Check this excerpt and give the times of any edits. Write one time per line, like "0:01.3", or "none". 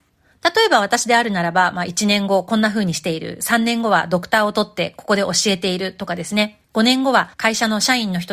0:06.6
0:07.3